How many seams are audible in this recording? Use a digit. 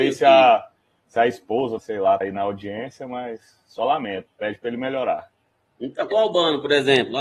3